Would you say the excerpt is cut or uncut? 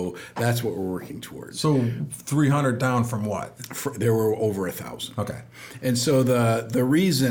uncut